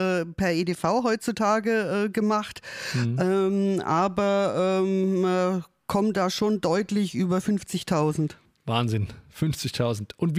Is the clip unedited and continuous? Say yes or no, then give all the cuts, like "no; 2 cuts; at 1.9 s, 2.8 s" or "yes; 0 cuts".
no; 1 cut; at 8.4 s